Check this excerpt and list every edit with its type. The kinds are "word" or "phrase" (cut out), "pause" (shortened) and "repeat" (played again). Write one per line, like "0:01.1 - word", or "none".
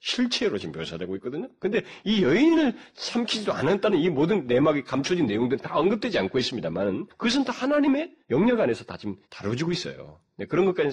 0:07.1 - pause
0:08.2 - pause
0:09.2 - pause